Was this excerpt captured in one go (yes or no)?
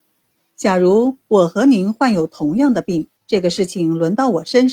no